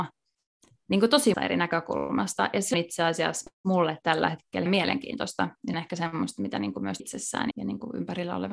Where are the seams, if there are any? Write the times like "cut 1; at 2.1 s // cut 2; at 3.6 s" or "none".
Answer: cut 1; at 1.3 s // cut 2; at 2.7 s // cut 3; at 4.7 s // cut 4; at 5.7 s // cut 5; at 7.0 s // cut 6; at 7.5 s